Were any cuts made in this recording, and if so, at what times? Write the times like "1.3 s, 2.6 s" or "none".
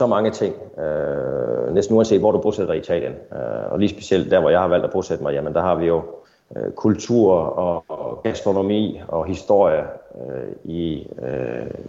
6.2 s